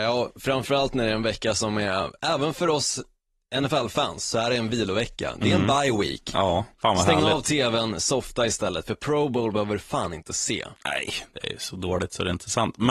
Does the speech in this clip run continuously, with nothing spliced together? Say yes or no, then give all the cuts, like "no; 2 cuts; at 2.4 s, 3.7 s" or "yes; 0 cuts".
no; 1 cut; at 6.7 s